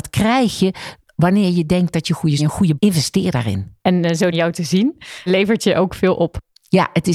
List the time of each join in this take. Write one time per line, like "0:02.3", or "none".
0:02.4
0:02.8
0:03.8
0:04.3
0:05.3